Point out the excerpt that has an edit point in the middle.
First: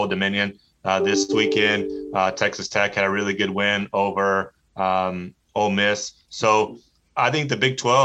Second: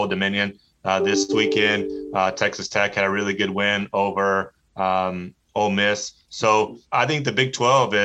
second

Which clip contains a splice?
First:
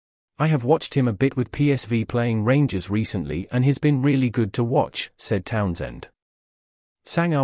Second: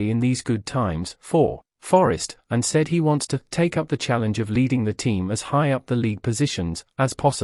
second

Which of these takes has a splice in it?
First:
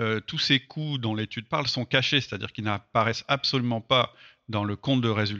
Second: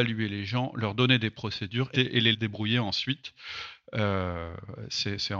second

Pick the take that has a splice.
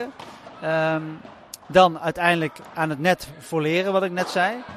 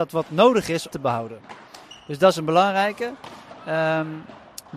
second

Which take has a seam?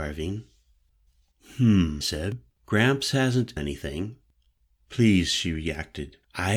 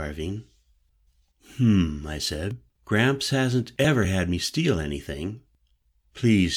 first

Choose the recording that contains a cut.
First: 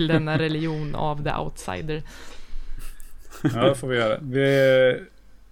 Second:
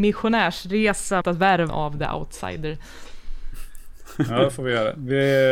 second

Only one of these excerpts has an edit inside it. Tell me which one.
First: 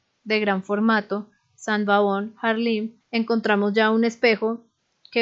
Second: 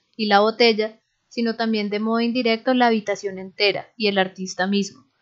first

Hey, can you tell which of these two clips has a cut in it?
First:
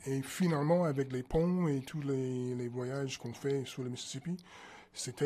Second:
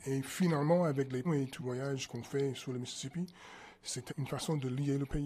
second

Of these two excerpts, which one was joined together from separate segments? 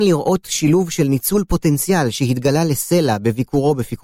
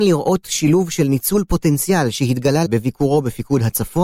second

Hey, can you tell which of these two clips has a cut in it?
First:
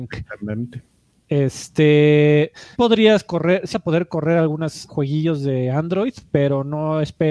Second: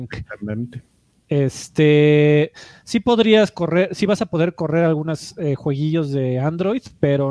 first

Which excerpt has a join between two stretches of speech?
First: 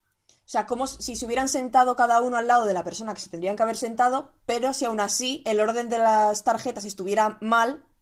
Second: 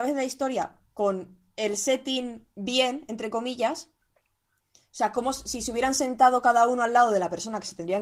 second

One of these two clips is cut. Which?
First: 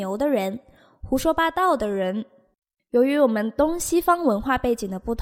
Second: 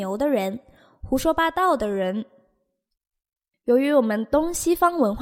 first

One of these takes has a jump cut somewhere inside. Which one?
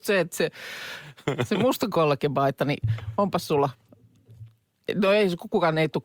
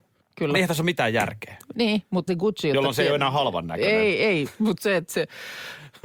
second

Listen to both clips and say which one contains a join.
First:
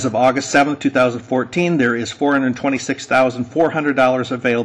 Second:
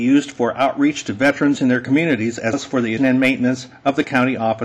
second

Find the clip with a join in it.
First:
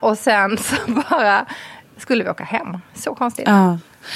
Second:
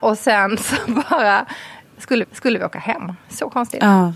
second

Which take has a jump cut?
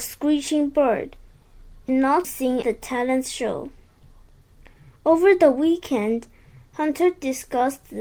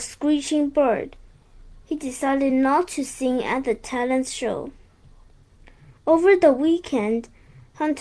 first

